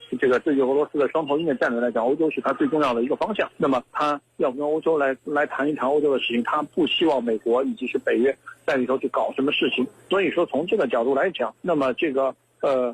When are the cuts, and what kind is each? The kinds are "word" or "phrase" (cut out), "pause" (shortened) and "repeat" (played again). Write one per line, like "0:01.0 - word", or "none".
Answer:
0:03.5 - pause
0:03.9 - pause
0:10.0 - pause
0:11.6 - pause